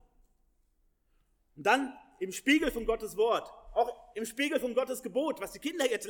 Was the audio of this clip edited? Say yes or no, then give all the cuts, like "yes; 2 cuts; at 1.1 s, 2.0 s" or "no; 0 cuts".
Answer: no; 0 cuts